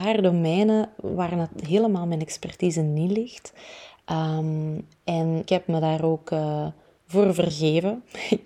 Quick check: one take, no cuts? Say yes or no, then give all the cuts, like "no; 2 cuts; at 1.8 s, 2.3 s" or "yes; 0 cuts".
no; 1 cut; at 5.5 s